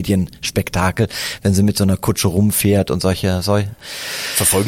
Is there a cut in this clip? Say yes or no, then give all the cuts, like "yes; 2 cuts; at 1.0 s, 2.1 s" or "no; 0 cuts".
no; 0 cuts